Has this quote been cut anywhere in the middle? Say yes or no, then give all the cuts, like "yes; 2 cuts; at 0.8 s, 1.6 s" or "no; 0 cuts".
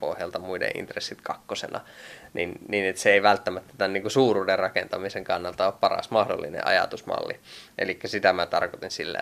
no; 0 cuts